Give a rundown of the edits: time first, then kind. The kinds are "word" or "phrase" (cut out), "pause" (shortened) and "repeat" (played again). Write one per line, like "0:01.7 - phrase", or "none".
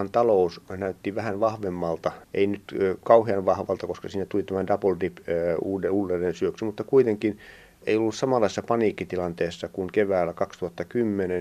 0:02.2 - pause